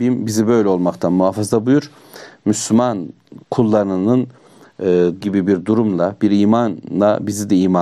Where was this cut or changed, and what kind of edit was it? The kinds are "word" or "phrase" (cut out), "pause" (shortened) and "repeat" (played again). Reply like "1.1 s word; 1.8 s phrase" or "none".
3.4 s pause; 5.2 s word